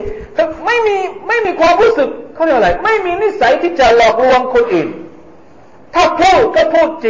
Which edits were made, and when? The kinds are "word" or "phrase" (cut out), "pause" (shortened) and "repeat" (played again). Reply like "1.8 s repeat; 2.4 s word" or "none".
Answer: none